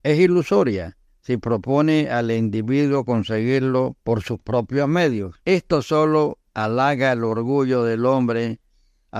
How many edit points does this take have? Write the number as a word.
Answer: four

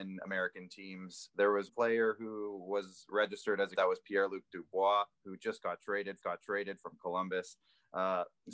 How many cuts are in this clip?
four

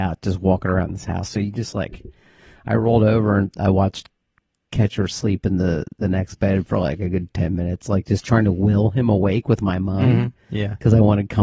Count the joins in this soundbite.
zero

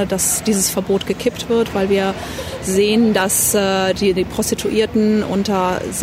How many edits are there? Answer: zero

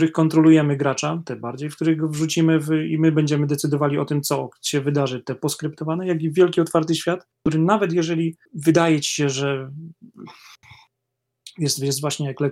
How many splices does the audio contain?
two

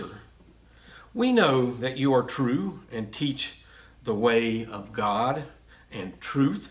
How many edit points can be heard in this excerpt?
zero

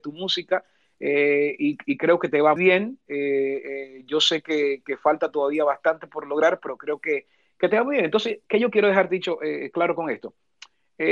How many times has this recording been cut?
one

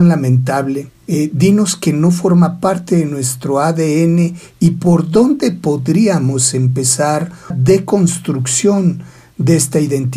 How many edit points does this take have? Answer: two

